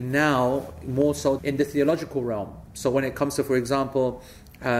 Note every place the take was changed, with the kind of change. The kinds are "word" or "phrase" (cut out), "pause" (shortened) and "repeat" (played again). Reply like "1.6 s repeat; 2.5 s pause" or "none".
1.4 s phrase

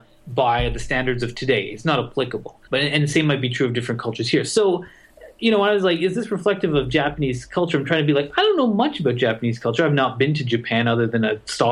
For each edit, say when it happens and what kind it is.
2.6 s pause

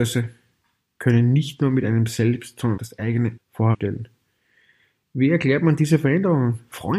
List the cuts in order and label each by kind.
2.8 s word; 3.4 s word; 3.7 s word

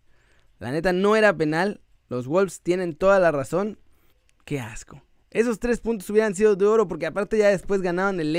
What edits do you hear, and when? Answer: 2.0 s pause; 4.1 s pause; 5.2 s pause

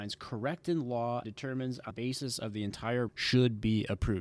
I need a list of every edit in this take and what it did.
1.2 s phrase; 1.9 s word; 3.1 s word

